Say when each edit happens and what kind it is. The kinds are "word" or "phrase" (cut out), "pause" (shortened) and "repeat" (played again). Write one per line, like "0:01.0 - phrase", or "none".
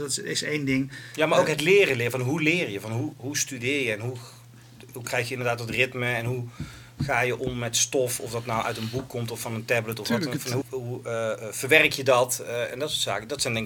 0:03.1 - word
0:10.6 - word